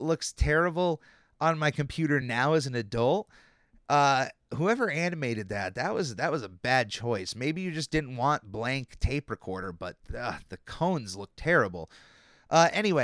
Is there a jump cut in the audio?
no; 0 cuts

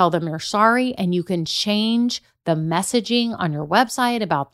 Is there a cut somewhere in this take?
no; 0 cuts

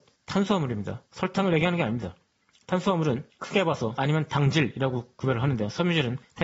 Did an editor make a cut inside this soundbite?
yes; 2 cuts; at 1.1 s, 4.0 s

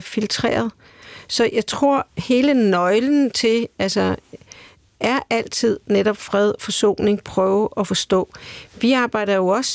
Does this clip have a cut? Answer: no; 0 cuts

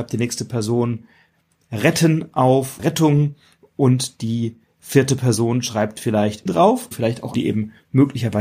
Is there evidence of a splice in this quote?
yes; 4 cuts; at 2.8 s, 6.5 s, 6.9 s, 7.3 s

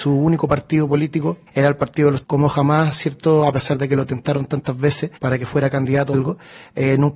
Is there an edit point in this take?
yes; 4 cuts; at 1.5 s, 2.2 s, 5.2 s, 6.1 s

